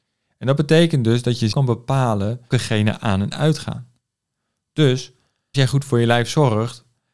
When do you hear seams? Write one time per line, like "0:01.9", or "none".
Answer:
0:01.5
0:02.5
0:05.5